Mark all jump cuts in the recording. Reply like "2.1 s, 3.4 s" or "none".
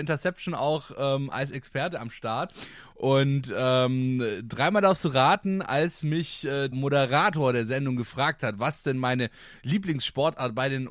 6.7 s